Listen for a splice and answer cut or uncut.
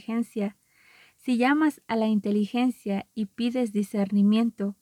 uncut